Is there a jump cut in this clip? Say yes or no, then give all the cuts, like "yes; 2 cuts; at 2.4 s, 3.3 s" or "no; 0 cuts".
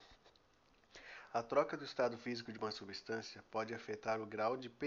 no; 0 cuts